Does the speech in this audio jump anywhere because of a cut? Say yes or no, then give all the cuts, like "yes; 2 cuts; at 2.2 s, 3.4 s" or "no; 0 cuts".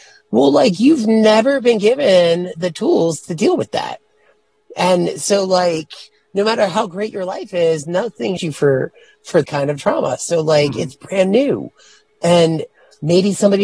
yes; 2 cuts; at 8.4 s, 9.4 s